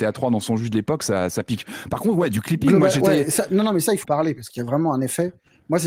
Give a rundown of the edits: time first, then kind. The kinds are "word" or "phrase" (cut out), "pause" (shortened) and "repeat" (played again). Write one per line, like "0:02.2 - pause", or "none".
0:04.0 - word